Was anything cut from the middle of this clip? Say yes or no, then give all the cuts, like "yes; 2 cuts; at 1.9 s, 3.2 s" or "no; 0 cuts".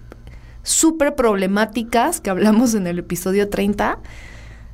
no; 0 cuts